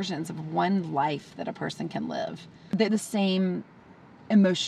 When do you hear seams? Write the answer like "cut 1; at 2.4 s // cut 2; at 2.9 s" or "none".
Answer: cut 1; at 2.9 s